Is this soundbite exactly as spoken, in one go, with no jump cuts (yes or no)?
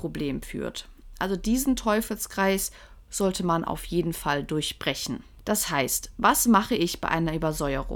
yes